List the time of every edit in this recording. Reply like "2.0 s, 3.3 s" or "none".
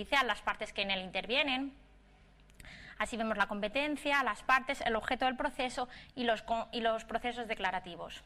none